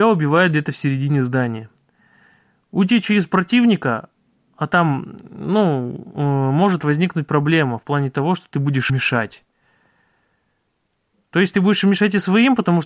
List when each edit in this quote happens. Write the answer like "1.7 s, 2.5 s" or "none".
8.9 s